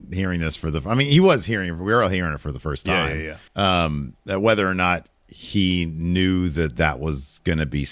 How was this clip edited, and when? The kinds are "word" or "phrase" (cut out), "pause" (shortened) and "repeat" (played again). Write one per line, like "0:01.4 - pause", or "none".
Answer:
0:03.5 - pause

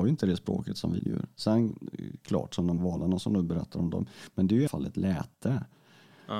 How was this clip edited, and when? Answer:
0:01.0 - word
0:02.8 - word
0:04.7 - word

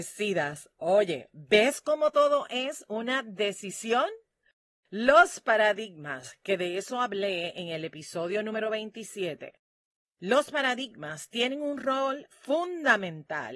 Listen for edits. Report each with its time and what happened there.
none

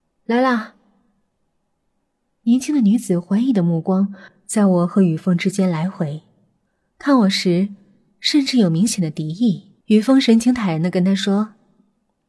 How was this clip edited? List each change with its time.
0:09.8 - pause

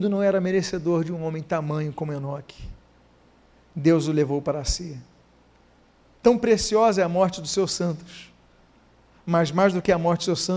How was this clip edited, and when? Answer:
none

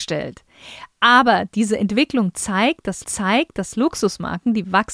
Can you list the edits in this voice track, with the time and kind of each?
0:03.0 - repeat

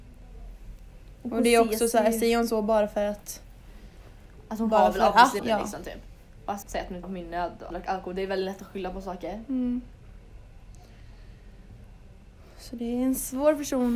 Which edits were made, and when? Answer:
0:05.4 - word
0:06.6 - word
0:07.0 - word
0:07.7 - word

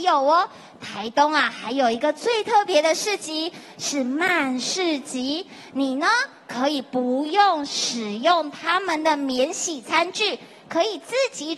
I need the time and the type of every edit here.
none

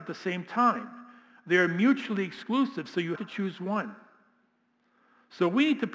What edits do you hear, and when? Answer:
0:03.1 - word

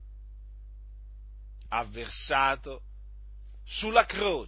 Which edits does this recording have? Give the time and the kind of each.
none

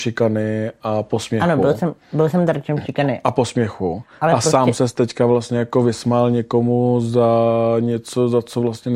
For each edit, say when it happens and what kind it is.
none

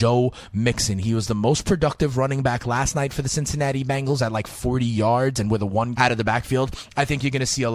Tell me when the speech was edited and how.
0:06.0 - word

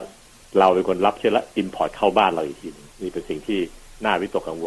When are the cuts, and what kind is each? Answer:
0:02.9 - pause

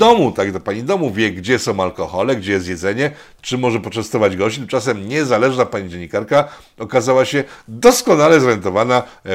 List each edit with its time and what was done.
none

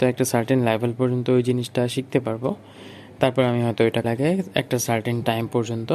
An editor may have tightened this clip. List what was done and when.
0:04.0 - word

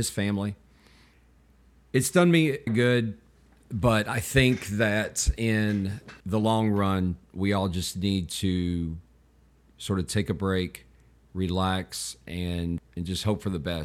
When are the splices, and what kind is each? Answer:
0:02.7 - phrase
0:12.8 - word

